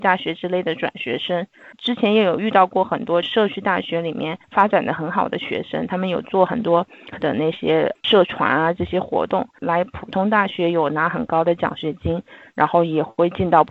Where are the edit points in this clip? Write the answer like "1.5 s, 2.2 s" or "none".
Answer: 4.4 s, 7.1 s